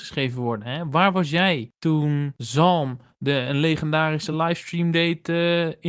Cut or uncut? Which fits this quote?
uncut